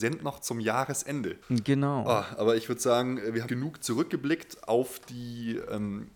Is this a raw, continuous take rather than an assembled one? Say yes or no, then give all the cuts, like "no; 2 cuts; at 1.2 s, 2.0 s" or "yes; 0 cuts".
no; 2 cuts; at 1.4 s, 3.5 s